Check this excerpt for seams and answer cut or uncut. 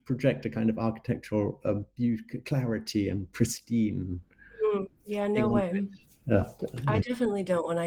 uncut